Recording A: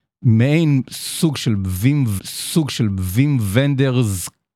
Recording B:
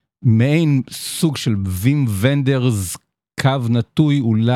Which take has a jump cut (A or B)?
A